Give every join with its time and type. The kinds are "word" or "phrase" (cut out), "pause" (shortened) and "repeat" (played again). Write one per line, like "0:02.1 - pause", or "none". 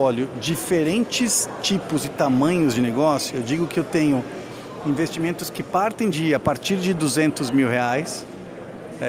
none